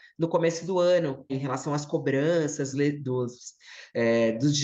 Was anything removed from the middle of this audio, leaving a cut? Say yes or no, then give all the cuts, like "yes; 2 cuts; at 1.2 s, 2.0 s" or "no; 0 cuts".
yes; 2 cuts; at 1.3 s, 2.7 s